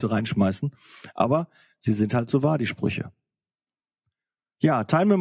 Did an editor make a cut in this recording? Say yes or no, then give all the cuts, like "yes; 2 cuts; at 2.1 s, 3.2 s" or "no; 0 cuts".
no; 0 cuts